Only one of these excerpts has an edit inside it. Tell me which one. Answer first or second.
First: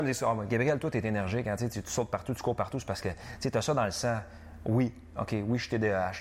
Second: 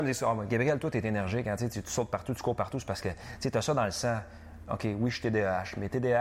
second